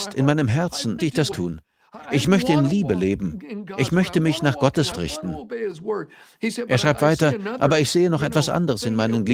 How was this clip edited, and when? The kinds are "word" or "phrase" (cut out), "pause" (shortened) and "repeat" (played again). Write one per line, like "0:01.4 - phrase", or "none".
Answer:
0:01.0 - word
0:01.3 - word
0:04.9 - word